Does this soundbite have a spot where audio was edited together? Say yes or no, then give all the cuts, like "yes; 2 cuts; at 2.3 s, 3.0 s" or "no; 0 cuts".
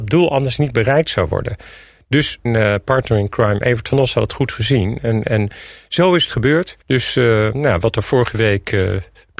yes; 2 cuts; at 2.5 s, 6.8 s